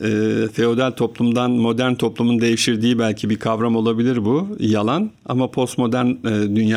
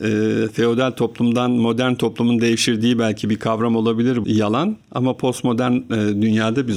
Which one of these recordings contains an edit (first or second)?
second